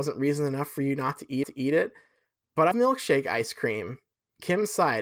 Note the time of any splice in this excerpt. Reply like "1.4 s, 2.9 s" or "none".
1.4 s, 2.7 s